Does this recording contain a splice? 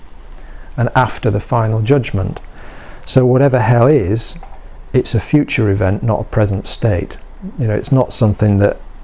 no; 0 cuts

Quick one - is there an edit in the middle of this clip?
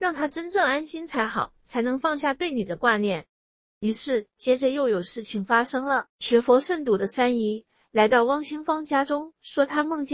no; 0 cuts

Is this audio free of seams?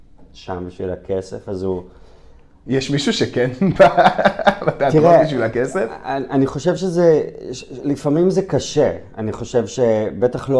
yes; 0 cuts

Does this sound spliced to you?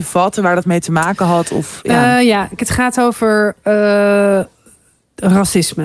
yes; 1 cut; at 2.6 s

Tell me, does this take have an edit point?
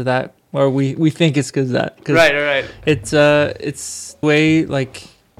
yes; 1 cut; at 4.2 s

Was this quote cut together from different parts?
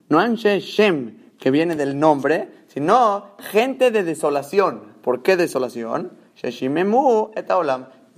no; 0 cuts

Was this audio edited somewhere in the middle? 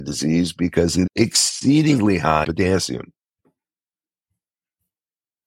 yes; 2 cuts; at 1.1 s, 2.4 s

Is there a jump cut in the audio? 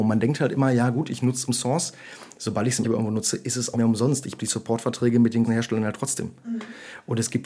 yes; 5 cuts; at 1.5 s, 2.8 s, 3.7 s, 4.4 s, 5.4 s

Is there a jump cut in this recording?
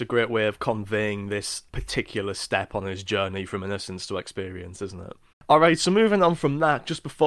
yes; 2 cuts; at 1.7 s, 5.3 s

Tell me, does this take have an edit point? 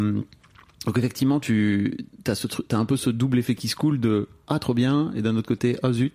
no; 0 cuts

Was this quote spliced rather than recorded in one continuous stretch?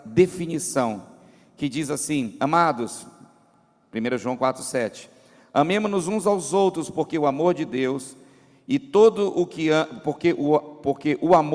no; 0 cuts

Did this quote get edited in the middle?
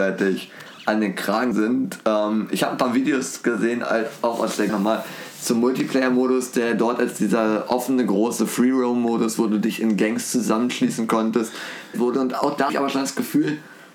yes; 4 cuts; at 1.5 s, 4.7 s, 11.9 s, 12.7 s

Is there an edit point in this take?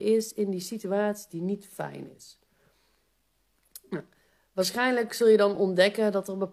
no; 0 cuts

